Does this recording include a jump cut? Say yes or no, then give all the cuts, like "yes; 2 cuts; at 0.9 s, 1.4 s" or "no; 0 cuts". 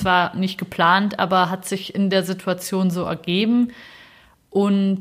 no; 0 cuts